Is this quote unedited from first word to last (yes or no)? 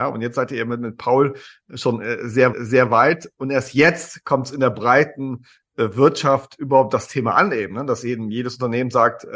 no